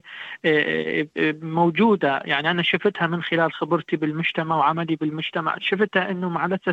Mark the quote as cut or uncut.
uncut